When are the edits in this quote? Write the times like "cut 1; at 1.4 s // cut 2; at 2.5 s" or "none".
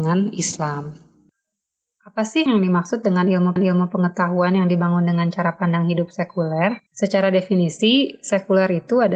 cut 1; at 2.5 s // cut 2; at 3.6 s // cut 3; at 6.9 s